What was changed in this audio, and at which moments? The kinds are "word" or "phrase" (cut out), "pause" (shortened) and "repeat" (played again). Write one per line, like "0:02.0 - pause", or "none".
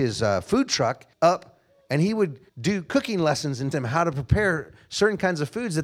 0:01.1 - pause
0:02.5 - pause
0:03.7 - word